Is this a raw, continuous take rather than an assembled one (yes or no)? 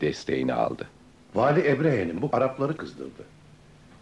no